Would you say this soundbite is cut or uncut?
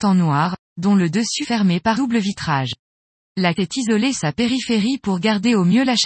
cut